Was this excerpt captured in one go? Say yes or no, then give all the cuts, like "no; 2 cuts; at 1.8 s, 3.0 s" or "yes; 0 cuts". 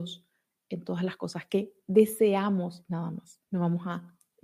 no; 1 cut; at 3.4 s